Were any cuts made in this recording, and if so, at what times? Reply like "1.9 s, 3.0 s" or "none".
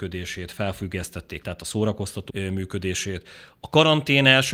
1.4 s, 2.3 s